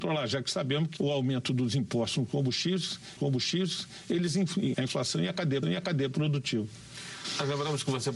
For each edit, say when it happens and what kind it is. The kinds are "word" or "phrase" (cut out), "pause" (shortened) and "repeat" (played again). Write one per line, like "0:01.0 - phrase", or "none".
0:01.0 - word
0:03.2 - repeat
0:04.7 - phrase
0:05.6 - repeat